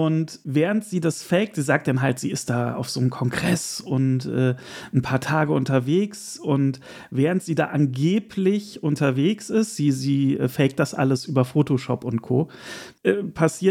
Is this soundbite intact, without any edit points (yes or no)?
yes